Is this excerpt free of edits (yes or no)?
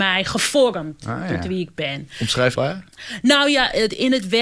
no